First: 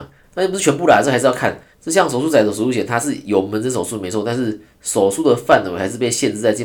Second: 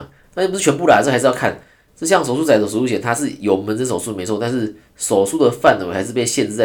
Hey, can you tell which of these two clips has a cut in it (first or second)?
first